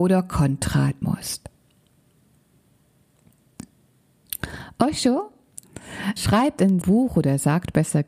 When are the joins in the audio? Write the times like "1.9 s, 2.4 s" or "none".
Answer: 1.0 s, 6.2 s, 6.8 s